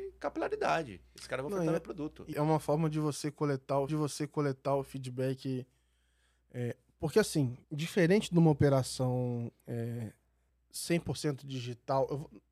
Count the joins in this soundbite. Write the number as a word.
four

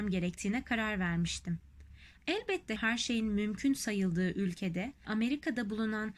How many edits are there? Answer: two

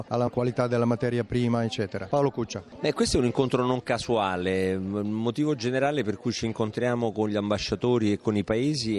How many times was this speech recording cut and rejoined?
zero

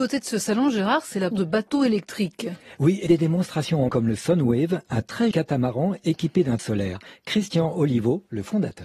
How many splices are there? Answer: five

